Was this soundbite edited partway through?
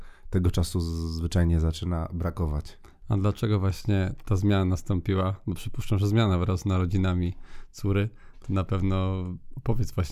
no; 0 cuts

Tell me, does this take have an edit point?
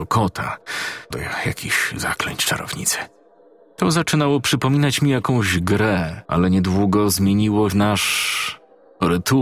yes; 4 cuts; at 1.1 s, 3.4 s, 6.2 s, 7.7 s

